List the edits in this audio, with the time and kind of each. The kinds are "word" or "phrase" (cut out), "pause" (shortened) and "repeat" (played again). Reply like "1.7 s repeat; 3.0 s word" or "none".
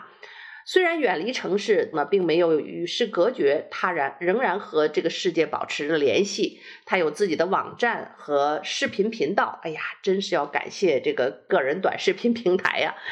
1.9 s phrase